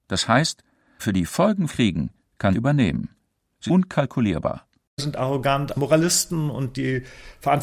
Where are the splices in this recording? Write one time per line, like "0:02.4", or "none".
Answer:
0:01.0
0:01.7
0:02.5
0:03.7
0:05.0
0:05.7